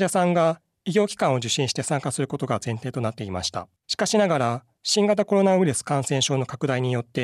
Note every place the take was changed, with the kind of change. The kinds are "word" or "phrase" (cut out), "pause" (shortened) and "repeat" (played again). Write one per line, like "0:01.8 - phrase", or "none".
0:03.8 - pause